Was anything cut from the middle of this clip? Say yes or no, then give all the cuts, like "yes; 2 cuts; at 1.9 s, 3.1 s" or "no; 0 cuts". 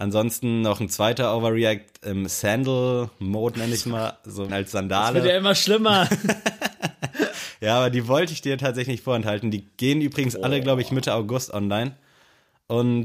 yes; 1 cut; at 4.5 s